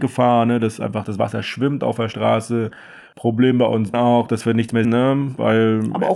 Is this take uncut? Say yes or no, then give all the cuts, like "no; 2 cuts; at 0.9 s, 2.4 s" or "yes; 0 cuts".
no; 2 cuts; at 3.9 s, 4.8 s